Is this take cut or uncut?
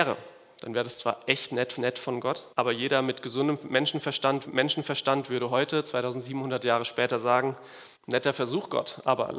cut